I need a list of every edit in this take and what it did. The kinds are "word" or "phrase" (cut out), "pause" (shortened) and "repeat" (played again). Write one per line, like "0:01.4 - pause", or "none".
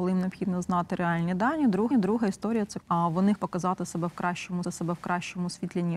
0:01.9 - repeat
0:02.8 - word
0:03.4 - word
0:04.6 - repeat